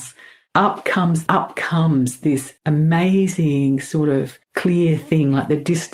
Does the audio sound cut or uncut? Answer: cut